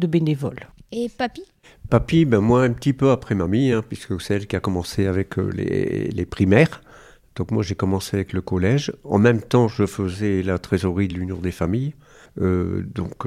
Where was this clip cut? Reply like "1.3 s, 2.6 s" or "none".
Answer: none